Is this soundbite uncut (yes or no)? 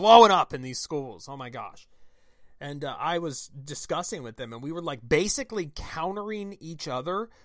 yes